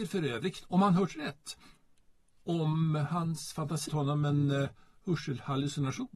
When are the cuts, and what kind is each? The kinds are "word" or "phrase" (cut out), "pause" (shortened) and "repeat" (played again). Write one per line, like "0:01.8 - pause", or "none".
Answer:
0:03.9 - word